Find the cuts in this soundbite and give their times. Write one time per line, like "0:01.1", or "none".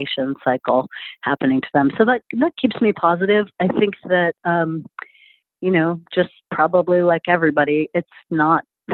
none